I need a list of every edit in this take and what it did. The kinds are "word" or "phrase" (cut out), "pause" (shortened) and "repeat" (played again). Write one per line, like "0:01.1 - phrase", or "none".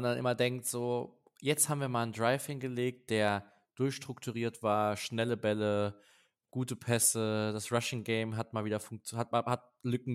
none